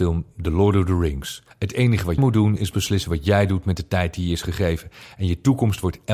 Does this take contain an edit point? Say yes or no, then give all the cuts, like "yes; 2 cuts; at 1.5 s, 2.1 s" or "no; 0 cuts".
yes; 2 cuts; at 1.5 s, 2.2 s